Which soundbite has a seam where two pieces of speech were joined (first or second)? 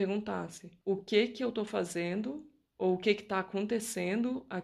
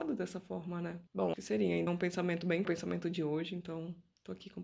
second